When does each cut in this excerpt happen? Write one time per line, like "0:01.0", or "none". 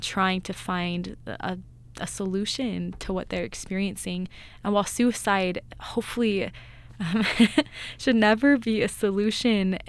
none